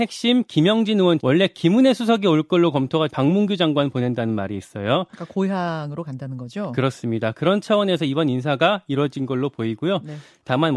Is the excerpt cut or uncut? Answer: cut